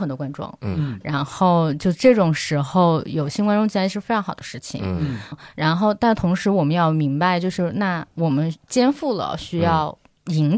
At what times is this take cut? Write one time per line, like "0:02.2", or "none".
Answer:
0:05.3